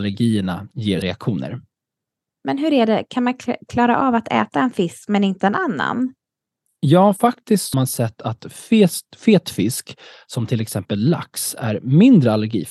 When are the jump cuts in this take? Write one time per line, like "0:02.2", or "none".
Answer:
0:01.0
0:07.7